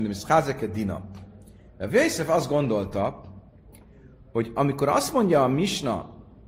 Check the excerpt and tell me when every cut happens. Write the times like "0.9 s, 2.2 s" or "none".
none